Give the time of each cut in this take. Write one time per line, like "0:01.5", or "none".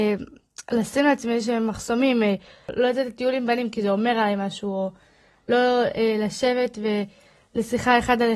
none